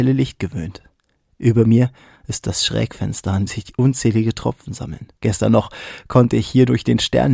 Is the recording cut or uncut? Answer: cut